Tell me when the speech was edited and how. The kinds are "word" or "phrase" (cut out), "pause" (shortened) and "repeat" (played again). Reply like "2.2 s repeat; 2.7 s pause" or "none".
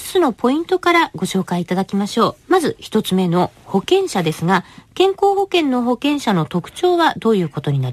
2.4 s pause